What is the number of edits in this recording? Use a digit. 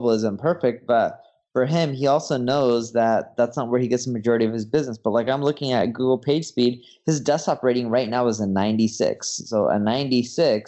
0